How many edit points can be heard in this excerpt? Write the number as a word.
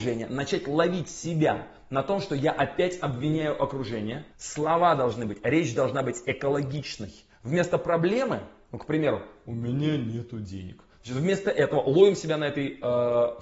one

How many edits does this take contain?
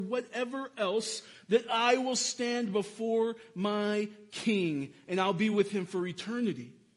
zero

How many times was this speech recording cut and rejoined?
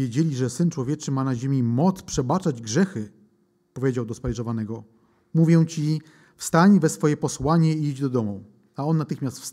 zero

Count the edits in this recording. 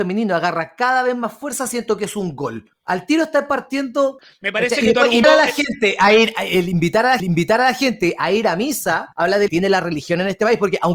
five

